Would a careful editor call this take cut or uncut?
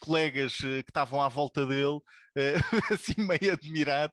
uncut